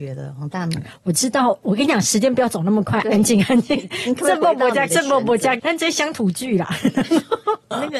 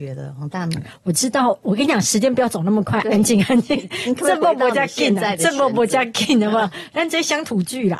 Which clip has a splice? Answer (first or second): first